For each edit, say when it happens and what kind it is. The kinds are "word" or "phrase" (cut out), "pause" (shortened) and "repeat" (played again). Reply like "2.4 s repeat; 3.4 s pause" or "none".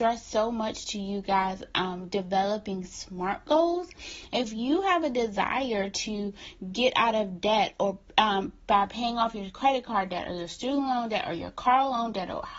none